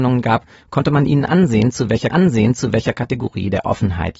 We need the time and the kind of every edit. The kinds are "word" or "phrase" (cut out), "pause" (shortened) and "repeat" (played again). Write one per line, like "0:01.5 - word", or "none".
0:02.1 - repeat